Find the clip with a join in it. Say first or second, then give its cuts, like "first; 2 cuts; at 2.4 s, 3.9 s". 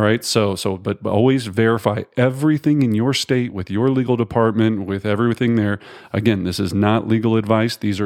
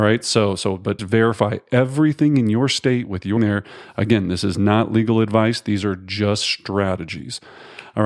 second; 2 cuts; at 1.0 s, 3.4 s